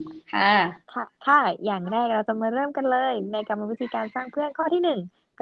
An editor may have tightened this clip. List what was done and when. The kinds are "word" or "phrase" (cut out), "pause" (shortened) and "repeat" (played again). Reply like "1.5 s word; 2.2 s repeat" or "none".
1.1 s pause

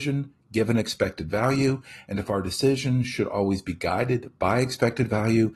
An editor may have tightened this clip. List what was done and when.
none

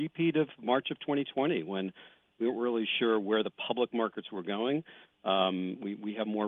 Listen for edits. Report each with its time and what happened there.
none

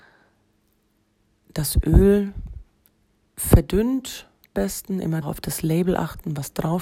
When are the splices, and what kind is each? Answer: 4.5 s word; 5.2 s word

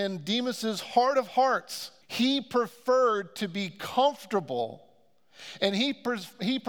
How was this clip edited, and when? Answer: 2.0 s pause

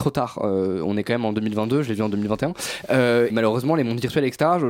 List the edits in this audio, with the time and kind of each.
3.3 s word

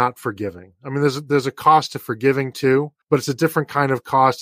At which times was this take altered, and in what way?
3.0 s pause

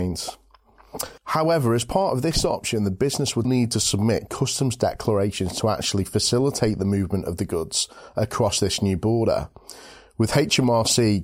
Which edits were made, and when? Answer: 1.2 s pause; 3.4 s word

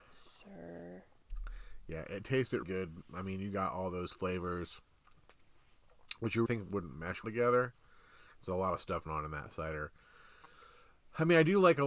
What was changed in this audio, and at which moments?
2.6 s word; 6.5 s word; 7.2 s word; 9.1 s word

